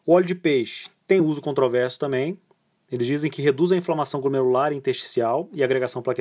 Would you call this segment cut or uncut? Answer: uncut